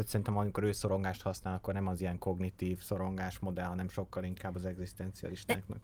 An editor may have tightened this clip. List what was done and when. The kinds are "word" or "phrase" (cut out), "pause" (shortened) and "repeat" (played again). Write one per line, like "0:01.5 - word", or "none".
none